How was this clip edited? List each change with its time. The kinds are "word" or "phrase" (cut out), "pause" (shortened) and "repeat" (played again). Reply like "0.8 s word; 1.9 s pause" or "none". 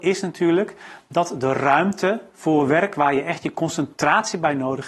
none